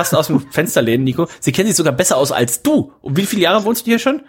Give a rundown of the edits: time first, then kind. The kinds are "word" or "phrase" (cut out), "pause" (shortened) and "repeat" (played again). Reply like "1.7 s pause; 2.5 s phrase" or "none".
none